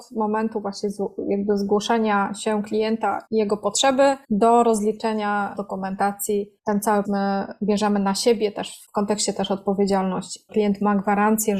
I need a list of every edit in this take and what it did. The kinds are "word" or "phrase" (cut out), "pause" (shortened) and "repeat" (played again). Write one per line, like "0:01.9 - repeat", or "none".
0:03.3 - word
0:04.2 - pause
0:05.5 - word
0:06.6 - pause
0:07.0 - word
0:08.9 - word
0:10.5 - word